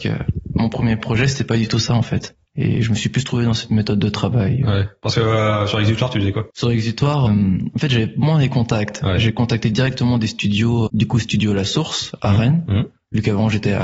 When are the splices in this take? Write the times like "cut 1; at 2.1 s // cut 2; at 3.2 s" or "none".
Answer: cut 1; at 2.5 s // cut 2; at 6.5 s // cut 3; at 7.3 s // cut 4; at 10.9 s